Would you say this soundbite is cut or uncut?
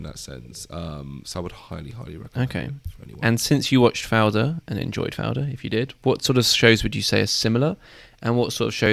uncut